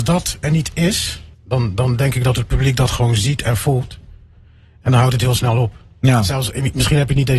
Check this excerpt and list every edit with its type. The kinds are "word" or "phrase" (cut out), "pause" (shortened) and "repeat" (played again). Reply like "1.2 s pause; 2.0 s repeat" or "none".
1.3 s pause